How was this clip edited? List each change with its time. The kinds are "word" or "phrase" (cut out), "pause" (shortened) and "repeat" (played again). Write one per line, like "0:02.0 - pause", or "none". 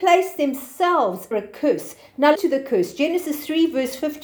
0:01.3 - word
0:02.3 - word

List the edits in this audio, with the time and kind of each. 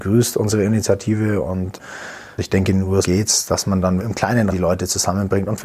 0:03.0 - word
0:04.0 - word
0:04.5 - word

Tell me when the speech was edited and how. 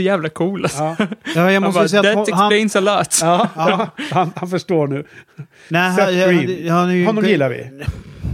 none

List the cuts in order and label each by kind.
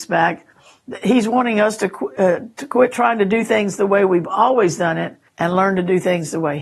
0:05.3 - pause

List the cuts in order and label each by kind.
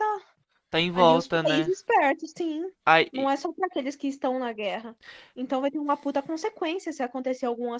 0:02.7 - pause

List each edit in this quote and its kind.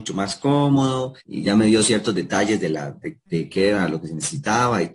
0:01.2 - pause
0:03.3 - pause

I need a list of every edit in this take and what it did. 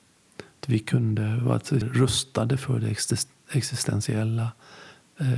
0:01.8 - phrase

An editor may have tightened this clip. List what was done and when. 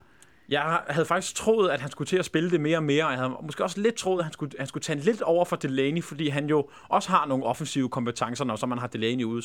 none

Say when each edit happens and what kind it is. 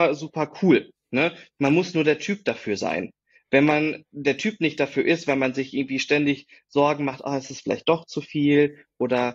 none

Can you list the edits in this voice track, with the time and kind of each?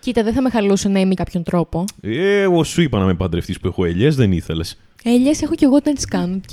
0:01.2 - phrase

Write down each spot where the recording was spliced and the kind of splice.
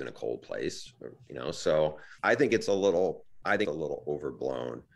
0:02.2 - pause
0:03.6 - word

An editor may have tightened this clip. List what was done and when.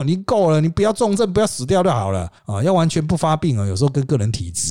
0:02.4 - pause

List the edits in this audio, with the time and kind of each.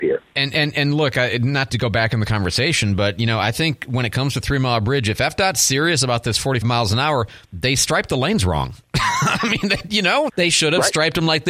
0:01.7 - word
0:06.6 - word
0:07.4 - pause
0:10.3 - word

